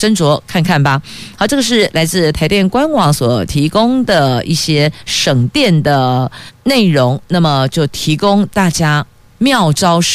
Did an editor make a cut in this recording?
no; 0 cuts

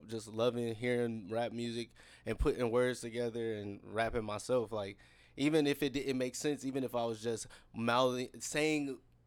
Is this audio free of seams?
yes; 0 cuts

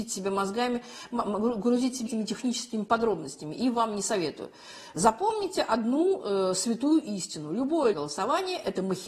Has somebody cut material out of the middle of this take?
yes; 2 cuts; at 2.1 s, 7.9 s

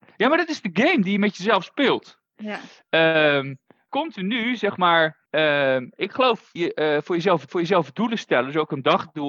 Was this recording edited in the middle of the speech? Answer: yes; 4 cuts; at 3.9 s, 5.3 s, 6.6 s, 7.5 s

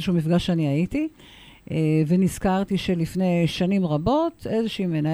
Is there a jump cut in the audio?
no; 0 cuts

